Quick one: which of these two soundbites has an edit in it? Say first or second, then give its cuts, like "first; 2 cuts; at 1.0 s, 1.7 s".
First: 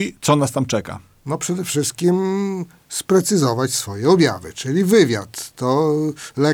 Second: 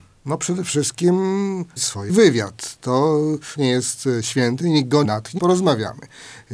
second; 5 cuts; at 1.8 s, 2.1 s, 3.6 s, 5.0 s, 5.4 s